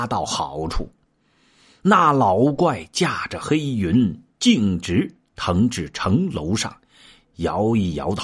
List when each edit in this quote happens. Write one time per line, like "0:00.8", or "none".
none